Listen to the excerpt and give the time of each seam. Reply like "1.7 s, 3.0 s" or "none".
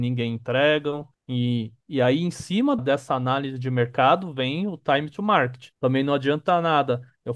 1.1 s, 2.8 s, 5.7 s